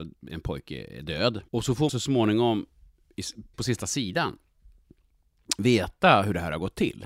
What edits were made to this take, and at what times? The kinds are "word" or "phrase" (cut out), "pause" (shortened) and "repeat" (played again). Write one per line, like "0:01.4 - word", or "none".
0:01.5 - pause
0:01.9 - word
0:03.5 - word